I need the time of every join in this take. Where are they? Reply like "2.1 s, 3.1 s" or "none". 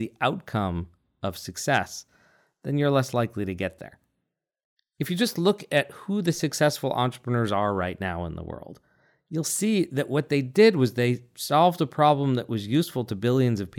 none